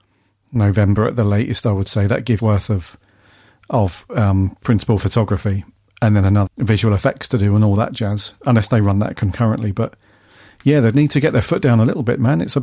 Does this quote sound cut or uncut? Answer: cut